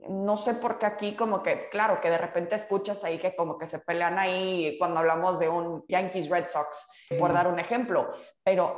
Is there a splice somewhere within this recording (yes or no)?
yes